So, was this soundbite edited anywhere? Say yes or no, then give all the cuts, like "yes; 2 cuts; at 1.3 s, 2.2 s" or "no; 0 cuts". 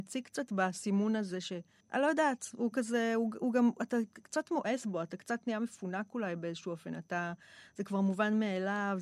yes; 1 cut; at 1.8 s